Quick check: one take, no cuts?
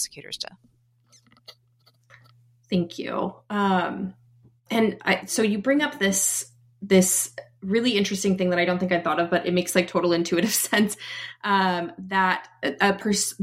yes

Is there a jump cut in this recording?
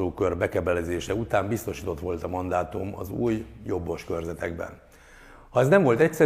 no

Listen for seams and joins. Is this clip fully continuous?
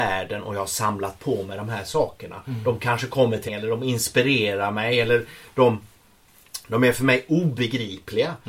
no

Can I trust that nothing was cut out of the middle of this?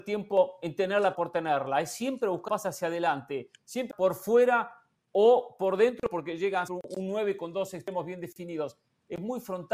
no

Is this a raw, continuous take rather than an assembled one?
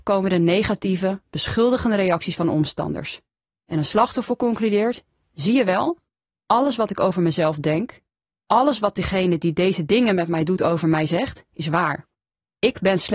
yes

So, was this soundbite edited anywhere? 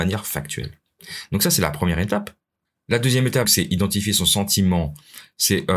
yes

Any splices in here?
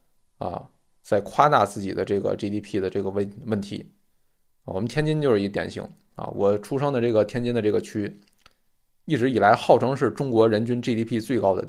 no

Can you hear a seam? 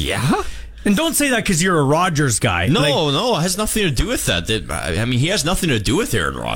no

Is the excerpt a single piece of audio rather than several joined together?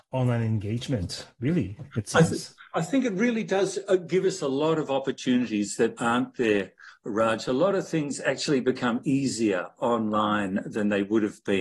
yes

